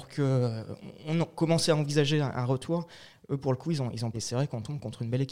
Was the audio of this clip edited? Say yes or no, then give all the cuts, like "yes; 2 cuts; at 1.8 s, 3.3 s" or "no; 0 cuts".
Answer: yes; 1 cut; at 4.1 s